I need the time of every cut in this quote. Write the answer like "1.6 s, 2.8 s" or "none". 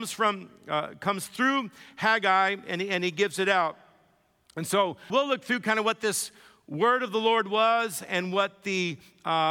5.1 s